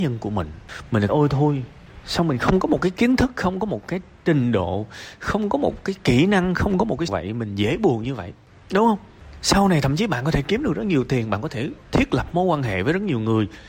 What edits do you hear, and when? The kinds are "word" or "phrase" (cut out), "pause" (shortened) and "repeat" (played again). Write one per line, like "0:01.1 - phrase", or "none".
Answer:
0:01.1 - phrase
0:07.1 - phrase
0:11.8 - pause